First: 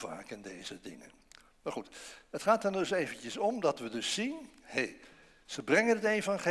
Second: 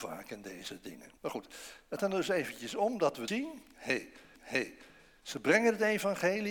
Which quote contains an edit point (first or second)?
second